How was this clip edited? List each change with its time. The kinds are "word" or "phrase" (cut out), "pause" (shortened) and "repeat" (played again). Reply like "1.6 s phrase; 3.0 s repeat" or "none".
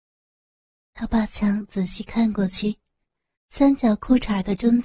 none